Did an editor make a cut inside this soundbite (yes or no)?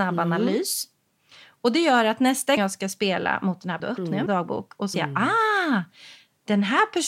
yes